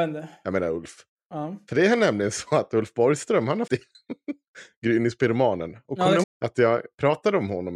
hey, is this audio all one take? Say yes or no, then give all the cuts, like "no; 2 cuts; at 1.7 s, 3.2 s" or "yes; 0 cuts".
no; 2 cuts; at 3.7 s, 6.2 s